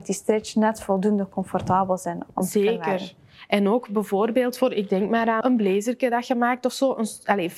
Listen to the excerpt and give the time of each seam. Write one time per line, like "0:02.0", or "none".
0:02.3
0:05.4